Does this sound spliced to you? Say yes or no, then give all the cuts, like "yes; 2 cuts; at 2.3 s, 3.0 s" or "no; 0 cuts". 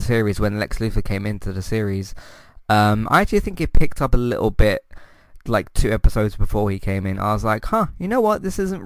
no; 0 cuts